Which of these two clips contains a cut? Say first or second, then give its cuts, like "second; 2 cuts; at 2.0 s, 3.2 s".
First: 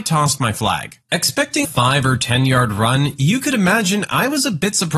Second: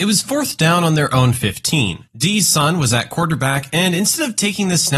first; 1 cut; at 1.6 s